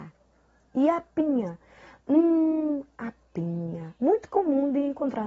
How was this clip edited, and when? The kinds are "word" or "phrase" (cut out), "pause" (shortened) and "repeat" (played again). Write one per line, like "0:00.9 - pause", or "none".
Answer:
0:04.0 - pause

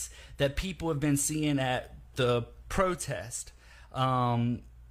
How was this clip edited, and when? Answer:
none

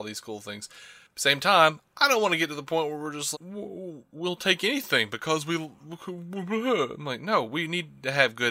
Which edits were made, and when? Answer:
0:03.3 - word

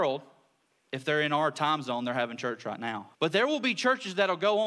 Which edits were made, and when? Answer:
0:03.1 - pause

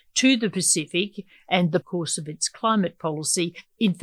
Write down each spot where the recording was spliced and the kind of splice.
0:01.8 - phrase

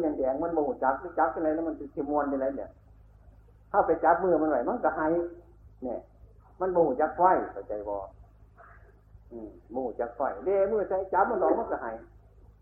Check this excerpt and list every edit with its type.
none

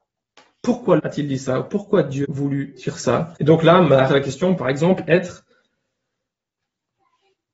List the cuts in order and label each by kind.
0:01.0 - word
0:02.2 - word
0:03.4 - pause
0:04.1 - word
0:04.6 - word

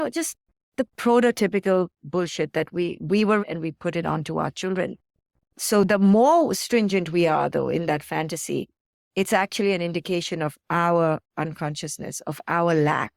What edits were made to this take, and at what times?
0:03.4 - phrase

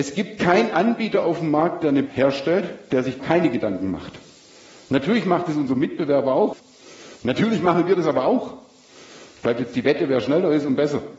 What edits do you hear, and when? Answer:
0:02.1 - word
0:03.2 - word

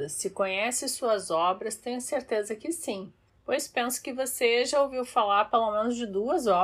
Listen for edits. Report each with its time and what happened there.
none

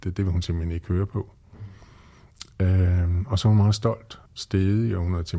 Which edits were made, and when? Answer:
0:04.3 - pause

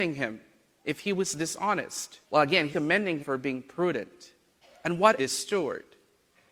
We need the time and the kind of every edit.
0:02.2 - pause
0:02.7 - word
0:03.2 - word
0:04.6 - pause
0:05.2 - phrase

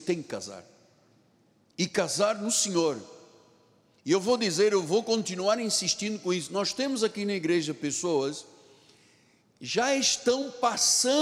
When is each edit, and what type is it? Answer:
none

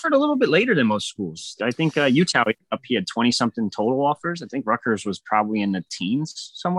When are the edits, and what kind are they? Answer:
none

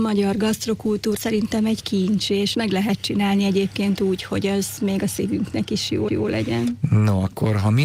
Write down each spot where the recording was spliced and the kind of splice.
0:01.2 - word
0:02.5 - word
0:06.1 - repeat

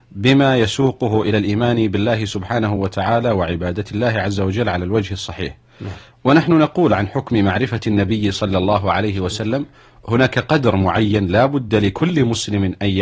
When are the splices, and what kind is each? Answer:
none

